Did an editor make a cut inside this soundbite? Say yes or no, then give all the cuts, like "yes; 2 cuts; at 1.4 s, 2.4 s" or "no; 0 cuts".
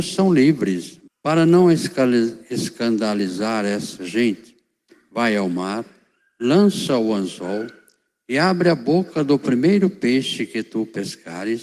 yes; 1 cut; at 1.1 s